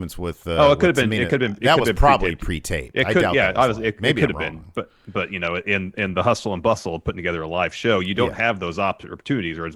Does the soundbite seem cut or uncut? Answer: uncut